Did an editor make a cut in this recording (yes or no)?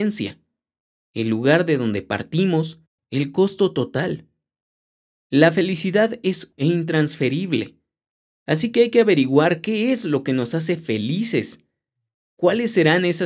yes